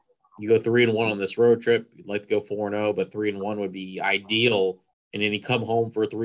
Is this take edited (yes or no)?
yes